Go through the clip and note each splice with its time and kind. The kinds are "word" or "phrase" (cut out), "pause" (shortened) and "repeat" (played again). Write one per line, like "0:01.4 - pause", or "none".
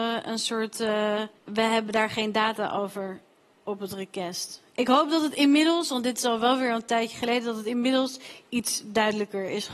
0:01.4 - pause